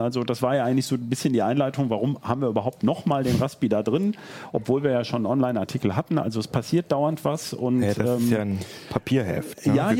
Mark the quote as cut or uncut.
uncut